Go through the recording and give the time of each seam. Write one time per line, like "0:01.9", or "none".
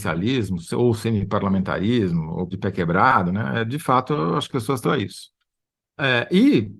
0:02.5
0:04.5
0:04.8